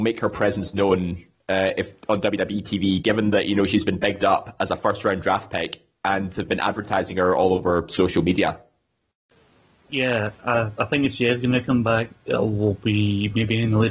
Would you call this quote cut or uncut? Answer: uncut